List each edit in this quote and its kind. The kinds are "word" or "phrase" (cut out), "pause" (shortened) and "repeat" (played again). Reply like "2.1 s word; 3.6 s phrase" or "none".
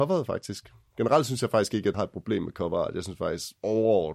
1.9 s word